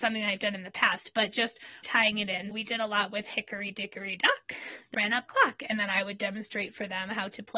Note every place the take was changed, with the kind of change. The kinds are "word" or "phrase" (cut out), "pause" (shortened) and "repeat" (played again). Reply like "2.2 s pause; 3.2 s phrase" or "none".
1.8 s word; 2.5 s word; 4.9 s word; 5.3 s word

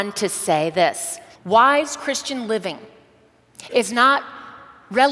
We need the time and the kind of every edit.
1.4 s pause

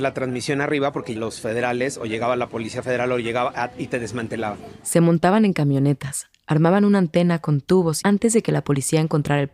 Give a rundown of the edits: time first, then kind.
1.2 s word; 8.0 s phrase

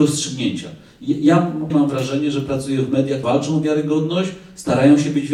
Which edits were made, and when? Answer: 1.7 s phrase; 3.2 s word

